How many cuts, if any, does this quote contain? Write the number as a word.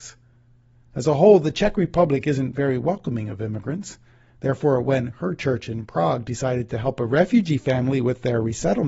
zero